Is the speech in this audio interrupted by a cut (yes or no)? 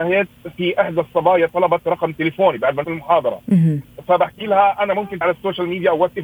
yes